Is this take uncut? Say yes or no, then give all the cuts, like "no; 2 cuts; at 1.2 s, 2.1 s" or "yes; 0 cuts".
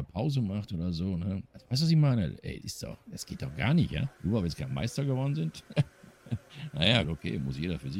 no; 4 cuts; at 2.6 s, 4.1 s, 5.9 s, 7.0 s